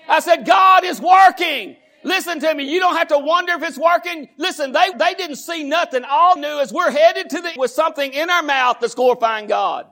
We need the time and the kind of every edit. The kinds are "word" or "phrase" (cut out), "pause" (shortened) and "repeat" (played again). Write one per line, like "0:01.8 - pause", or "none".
0:04.9 - word
0:06.4 - word
0:07.6 - word